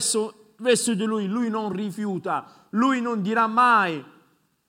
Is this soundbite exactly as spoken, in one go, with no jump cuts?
yes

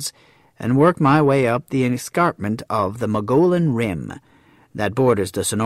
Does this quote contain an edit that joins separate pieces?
no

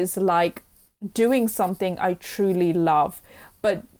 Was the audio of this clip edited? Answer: no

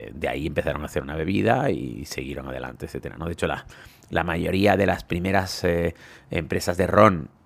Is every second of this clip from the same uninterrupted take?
yes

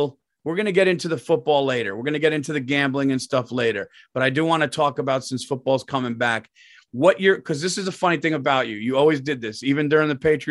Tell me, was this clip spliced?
no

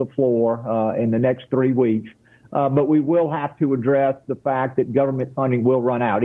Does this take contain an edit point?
no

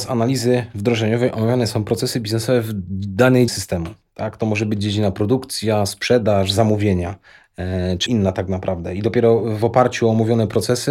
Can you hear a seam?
yes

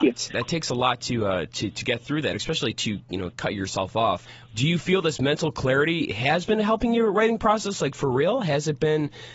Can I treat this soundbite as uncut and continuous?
yes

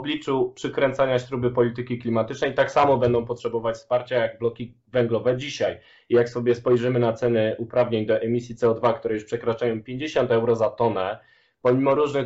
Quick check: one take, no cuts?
yes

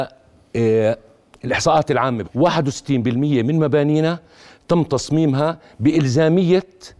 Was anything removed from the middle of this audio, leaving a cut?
yes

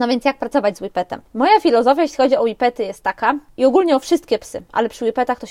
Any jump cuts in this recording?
no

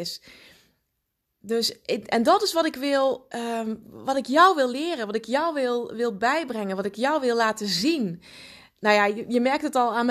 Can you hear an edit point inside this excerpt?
no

